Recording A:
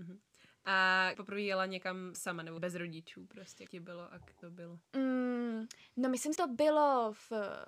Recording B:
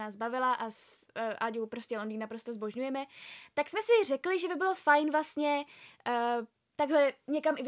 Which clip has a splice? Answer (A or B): A